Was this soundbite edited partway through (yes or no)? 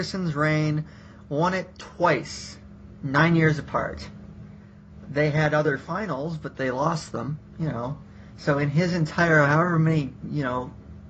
no